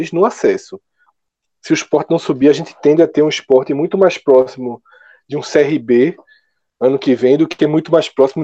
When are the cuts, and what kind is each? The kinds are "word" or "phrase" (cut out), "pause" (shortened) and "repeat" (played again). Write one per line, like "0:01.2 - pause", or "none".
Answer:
none